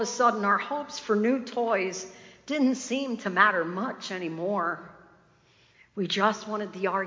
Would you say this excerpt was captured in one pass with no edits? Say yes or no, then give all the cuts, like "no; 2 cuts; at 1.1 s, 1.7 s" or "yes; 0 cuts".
yes; 0 cuts